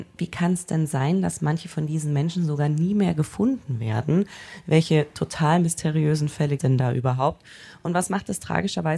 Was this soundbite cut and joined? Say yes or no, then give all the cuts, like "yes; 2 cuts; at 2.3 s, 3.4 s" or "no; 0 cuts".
yes; 1 cut; at 6.6 s